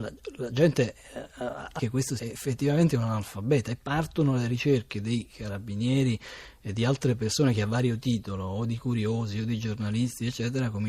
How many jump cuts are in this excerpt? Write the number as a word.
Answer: two